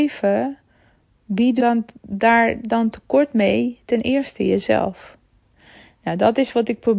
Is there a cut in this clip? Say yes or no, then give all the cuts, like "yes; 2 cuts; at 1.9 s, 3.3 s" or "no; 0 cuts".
yes; 1 cut; at 1.6 s